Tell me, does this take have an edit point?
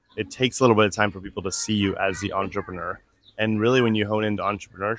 no; 0 cuts

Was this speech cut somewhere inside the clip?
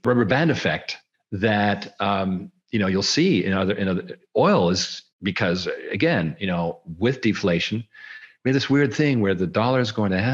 yes; 2 cuts; at 1.1 s, 5.1 s

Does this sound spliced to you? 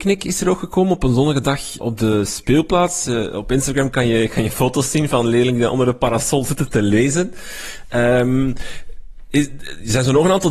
yes; 1 cut; at 1.8 s

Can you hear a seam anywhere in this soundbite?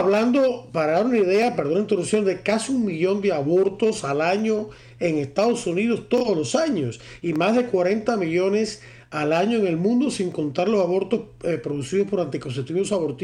no; 0 cuts

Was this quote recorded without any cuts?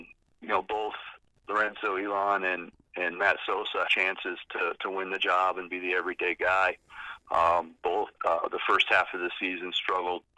no; 2 cuts; at 3.8 s, 8.1 s

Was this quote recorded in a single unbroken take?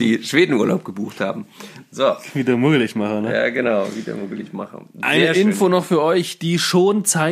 yes; 0 cuts

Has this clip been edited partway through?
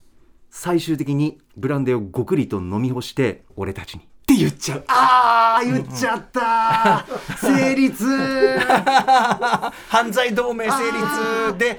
yes; 1 cut; at 3.5 s

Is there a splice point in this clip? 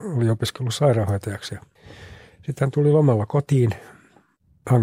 no; 0 cuts

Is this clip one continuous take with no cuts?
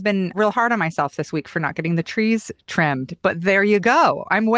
yes; 0 cuts

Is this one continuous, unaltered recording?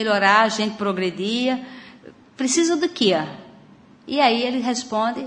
yes; 0 cuts

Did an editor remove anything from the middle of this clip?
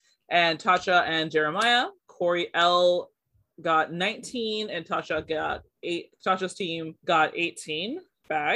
yes; 2 cuts; at 2.0 s, 7.0 s

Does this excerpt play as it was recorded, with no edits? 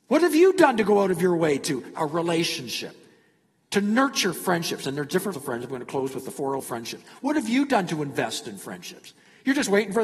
no; 3 cuts; at 1.9 s, 5.3 s, 6.6 s

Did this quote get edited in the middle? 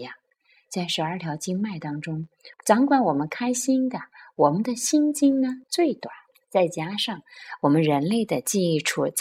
yes; 3 cuts; at 2.5 s, 5.6 s, 6.3 s

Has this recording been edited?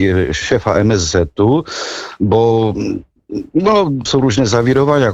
yes; 1 cut; at 4.1 s

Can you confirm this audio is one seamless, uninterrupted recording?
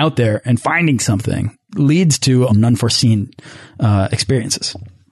no; 2 cuts; at 1.7 s, 2.5 s

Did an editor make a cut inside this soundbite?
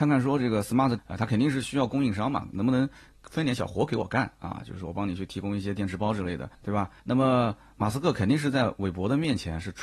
yes; 3 cuts; at 1.0 s, 6.5 s, 7.0 s

